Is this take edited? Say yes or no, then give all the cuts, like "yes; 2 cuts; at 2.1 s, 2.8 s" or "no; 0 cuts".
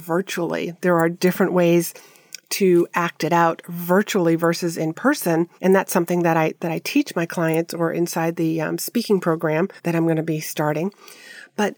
yes; 2 cuts; at 5.6 s, 9.8 s